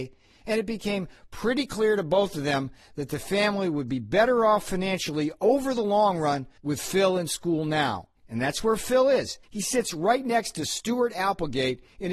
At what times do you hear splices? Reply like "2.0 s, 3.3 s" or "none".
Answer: 6.6 s, 8.2 s, 9.4 s